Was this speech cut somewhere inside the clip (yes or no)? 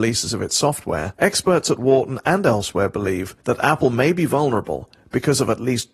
yes